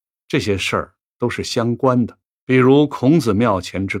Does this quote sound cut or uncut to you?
cut